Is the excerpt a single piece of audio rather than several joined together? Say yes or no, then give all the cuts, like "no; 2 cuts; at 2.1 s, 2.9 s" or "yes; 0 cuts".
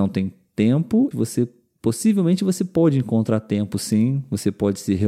no; 1 cut; at 1.1 s